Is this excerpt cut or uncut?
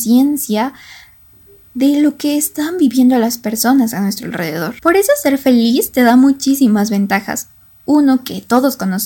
cut